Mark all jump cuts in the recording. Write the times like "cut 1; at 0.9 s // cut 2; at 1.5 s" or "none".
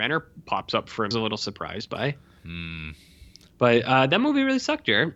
cut 1; at 1.1 s

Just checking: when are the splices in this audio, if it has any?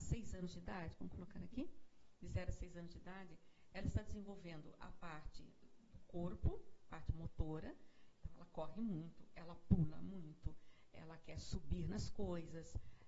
none

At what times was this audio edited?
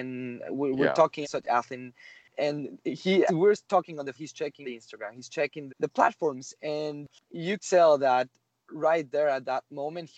cut 1; at 1.2 s // cut 2; at 3.3 s // cut 3; at 4.1 s // cut 4; at 4.6 s // cut 5; at 5.7 s // cut 6; at 7.6 s

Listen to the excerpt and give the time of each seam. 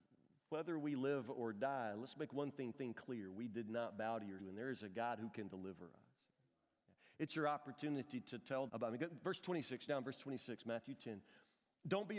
cut 1; at 2.7 s // cut 2; at 4.4 s // cut 3; at 8.7 s // cut 4; at 9.9 s

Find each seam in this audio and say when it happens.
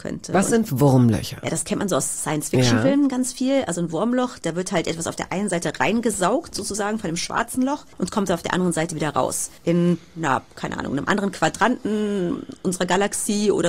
cut 1; at 7.9 s // cut 2; at 9.6 s

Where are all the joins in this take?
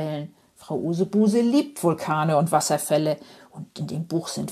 none

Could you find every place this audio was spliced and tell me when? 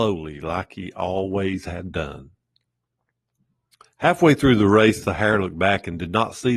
none

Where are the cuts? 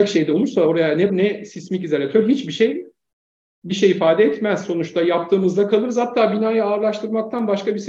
cut 1; at 1.1 s

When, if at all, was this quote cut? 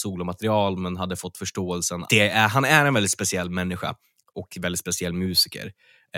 cut 1; at 2.0 s

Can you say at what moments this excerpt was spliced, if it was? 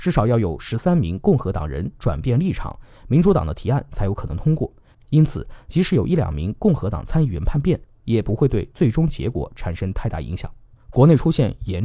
none

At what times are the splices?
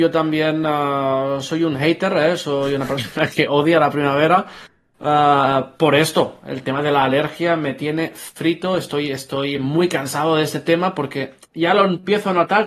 none

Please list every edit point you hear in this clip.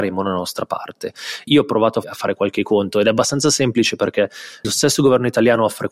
cut 1; at 1.5 s // cut 2; at 2.0 s // cut 3; at 4.6 s

